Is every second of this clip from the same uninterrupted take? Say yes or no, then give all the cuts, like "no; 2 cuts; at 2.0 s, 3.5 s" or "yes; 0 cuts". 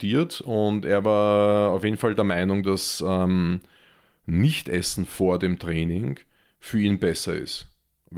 yes; 0 cuts